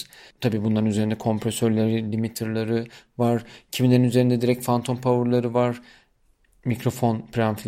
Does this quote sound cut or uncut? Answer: uncut